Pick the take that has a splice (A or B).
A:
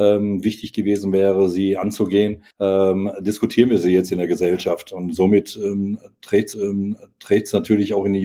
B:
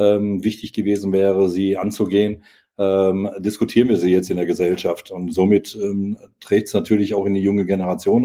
A